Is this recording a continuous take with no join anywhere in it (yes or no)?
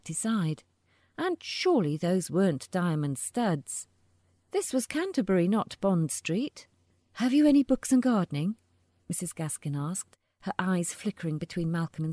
yes